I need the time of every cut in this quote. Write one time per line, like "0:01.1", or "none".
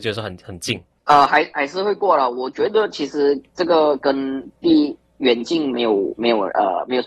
0:01.0